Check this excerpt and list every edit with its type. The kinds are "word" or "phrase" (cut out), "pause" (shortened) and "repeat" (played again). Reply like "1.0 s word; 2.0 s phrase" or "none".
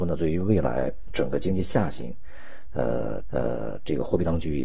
3.2 s repeat